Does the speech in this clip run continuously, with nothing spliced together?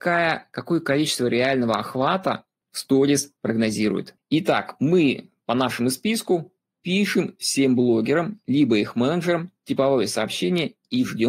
no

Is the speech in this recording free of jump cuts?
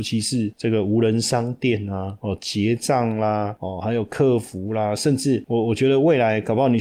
yes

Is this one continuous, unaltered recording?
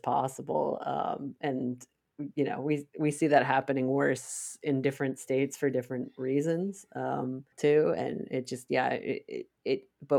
no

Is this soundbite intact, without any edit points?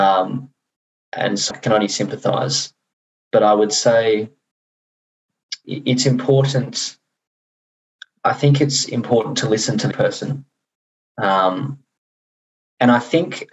no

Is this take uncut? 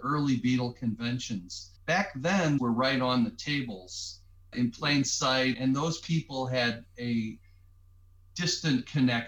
no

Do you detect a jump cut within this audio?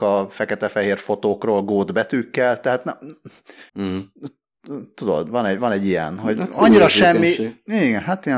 yes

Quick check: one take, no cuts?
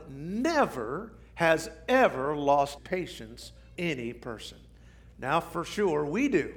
no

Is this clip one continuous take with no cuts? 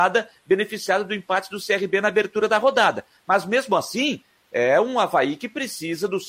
yes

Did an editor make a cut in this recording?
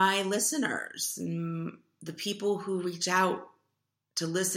no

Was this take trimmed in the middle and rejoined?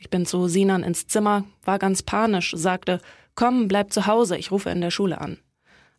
no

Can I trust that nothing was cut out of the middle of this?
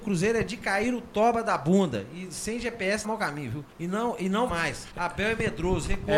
no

